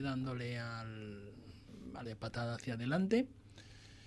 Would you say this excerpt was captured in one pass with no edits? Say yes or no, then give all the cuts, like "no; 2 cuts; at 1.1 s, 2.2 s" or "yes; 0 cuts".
no; 1 cut; at 2.1 s